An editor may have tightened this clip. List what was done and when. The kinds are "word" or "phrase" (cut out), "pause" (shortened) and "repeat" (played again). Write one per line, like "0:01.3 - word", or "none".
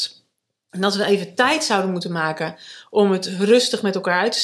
none